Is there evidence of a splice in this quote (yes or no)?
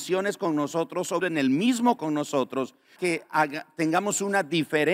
yes